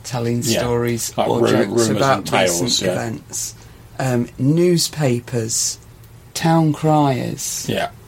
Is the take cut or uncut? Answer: uncut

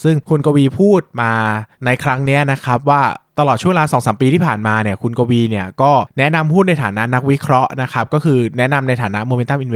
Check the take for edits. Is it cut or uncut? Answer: cut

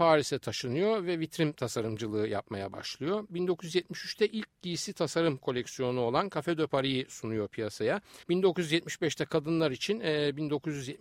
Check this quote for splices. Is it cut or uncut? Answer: cut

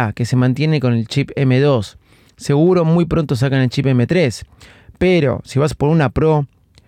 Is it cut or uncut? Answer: uncut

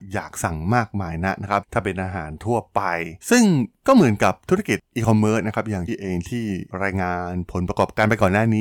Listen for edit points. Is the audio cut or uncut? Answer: cut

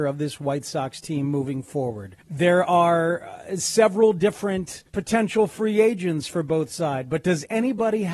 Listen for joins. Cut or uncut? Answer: cut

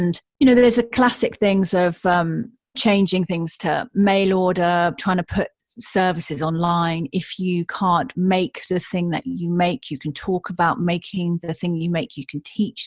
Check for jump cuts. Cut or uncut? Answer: uncut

